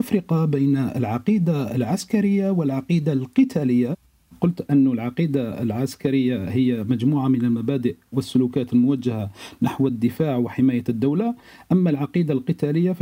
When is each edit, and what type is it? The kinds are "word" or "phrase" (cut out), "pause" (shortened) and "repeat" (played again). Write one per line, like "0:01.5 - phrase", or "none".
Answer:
none